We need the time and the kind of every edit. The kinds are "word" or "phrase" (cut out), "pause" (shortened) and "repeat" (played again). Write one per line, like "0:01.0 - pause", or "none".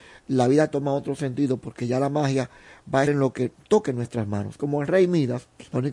0:03.1 - word